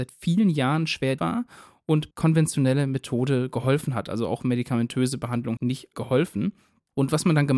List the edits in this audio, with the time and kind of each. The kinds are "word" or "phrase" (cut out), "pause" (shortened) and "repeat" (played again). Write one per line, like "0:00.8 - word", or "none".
0:01.2 - word
0:02.1 - phrase
0:05.6 - word